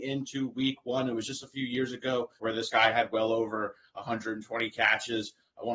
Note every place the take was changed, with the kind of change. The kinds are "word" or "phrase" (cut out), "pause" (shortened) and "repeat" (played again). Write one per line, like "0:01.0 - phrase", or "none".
0:02.4 - pause